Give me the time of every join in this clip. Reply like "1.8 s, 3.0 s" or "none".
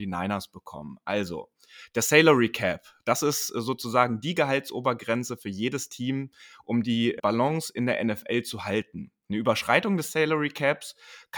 7.2 s